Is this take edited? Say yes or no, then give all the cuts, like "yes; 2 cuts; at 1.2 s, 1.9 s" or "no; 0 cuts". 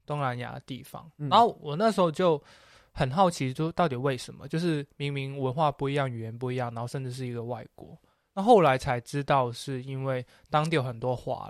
no; 0 cuts